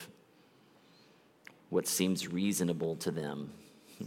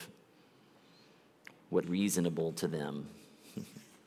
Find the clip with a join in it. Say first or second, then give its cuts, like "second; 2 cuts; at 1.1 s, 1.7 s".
second; 1 cut; at 1.8 s